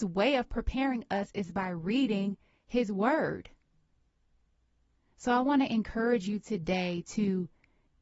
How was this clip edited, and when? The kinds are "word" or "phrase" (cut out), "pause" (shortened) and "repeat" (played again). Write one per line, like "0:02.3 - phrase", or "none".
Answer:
none